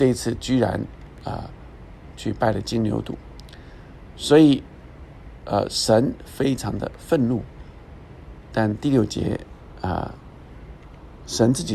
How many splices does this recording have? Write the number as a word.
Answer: zero